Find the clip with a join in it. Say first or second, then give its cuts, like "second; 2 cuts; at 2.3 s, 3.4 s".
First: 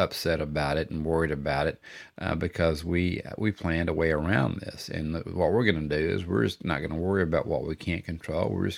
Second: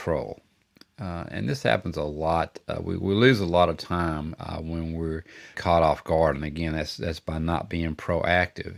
second; 1 cut; at 5.5 s